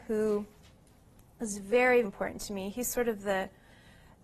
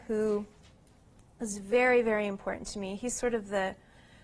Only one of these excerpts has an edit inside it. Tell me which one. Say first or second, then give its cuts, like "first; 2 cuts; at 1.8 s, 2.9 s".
first; 1 cut; at 2.0 s